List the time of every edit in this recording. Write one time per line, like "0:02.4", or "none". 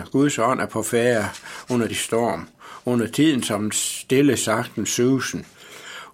0:01.9